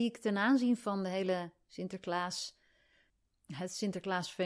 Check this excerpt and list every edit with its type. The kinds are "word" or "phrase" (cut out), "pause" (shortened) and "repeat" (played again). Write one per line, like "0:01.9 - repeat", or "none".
none